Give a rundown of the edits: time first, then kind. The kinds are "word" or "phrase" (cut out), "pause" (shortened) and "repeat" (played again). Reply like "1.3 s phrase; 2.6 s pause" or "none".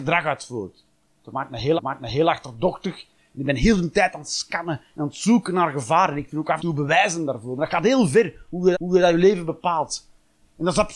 1.8 s repeat; 6.6 s word; 8.7 s repeat